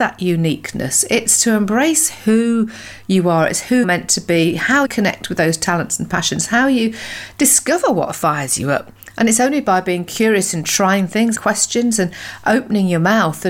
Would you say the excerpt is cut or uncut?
cut